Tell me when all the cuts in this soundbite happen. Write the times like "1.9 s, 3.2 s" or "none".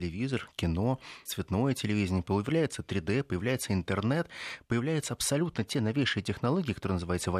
1.3 s